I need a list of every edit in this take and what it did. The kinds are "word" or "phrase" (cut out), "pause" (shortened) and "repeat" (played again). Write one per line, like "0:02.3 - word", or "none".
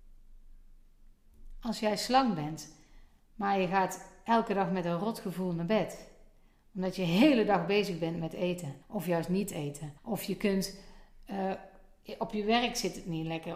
0:08.8 - pause
0:10.0 - pause